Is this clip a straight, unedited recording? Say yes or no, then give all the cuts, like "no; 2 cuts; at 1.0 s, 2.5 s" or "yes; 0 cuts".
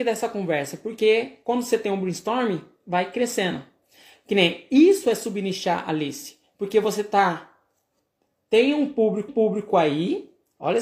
no; 1 cut; at 9.3 s